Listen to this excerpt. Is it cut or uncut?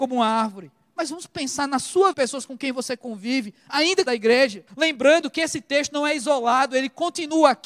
cut